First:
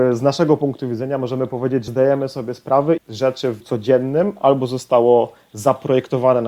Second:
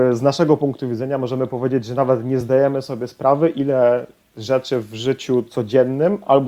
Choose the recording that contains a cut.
first; 3 cuts; at 1.9 s, 3.0 s, 3.6 s

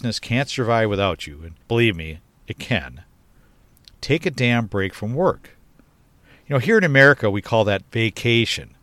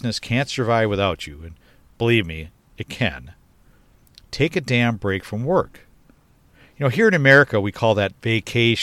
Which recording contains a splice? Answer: first; 1 cut; at 1.6 s

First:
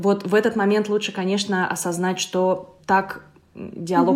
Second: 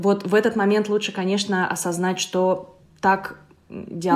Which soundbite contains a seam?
first; 1 cut; at 2.8 s

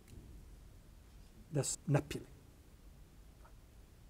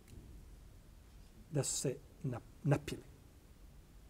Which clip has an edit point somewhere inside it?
first; 1 cut; at 1.7 s

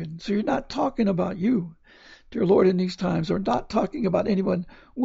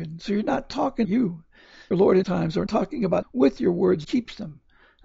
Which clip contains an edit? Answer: second; 6 cuts; at 1.0 s, 1.9 s, 2.2 s, 2.7 s, 3.2 s, 4.0 s

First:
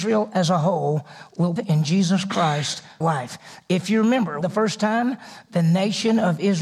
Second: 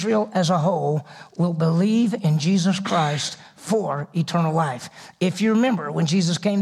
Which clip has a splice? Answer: first; 3 cuts; at 1.6 s, 3.0 s, 4.4 s

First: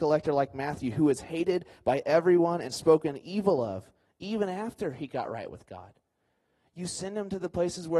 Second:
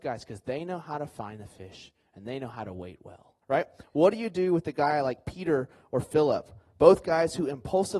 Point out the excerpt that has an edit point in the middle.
second; 1 cut; at 3.4 s

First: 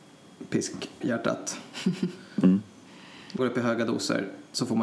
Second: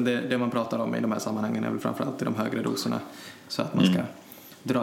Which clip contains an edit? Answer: first; 2 cuts; at 1.0 s, 3.4 s

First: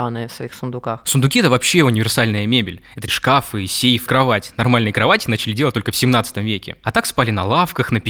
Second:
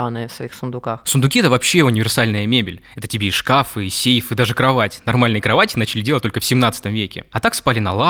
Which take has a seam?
first; 2 cuts; at 3.1 s, 4.1 s

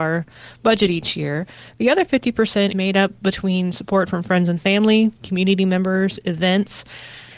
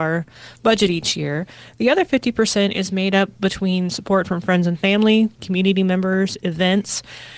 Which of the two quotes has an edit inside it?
first; 1 cut; at 2.7 s

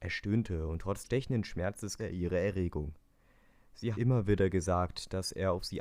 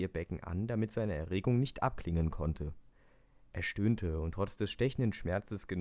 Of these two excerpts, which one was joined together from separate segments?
first; 3 cuts; at 1.0 s, 2.0 s, 3.9 s

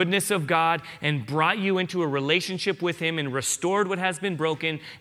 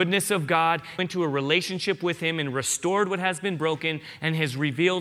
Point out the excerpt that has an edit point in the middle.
second; 1 cut; at 1.0 s

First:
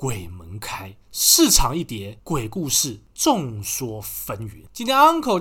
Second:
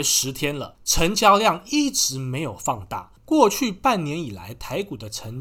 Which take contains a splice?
first; 1 cut; at 1.0 s

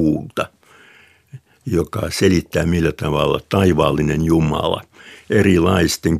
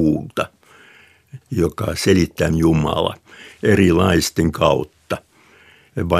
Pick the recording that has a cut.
second; 3 cuts; at 1.4 s, 2.5 s, 4.5 s

